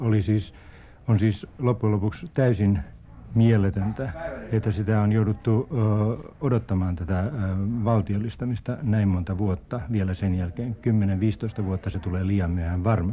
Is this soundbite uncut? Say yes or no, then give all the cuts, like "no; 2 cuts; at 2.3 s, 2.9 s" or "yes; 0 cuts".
yes; 0 cuts